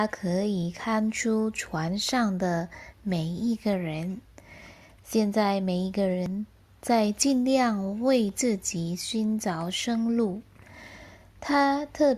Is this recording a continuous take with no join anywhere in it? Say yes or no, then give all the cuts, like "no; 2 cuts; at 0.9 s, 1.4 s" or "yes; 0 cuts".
yes; 0 cuts